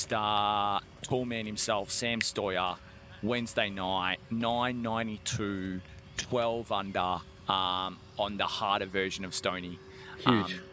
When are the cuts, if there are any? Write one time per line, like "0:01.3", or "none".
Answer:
0:04.2
0:07.4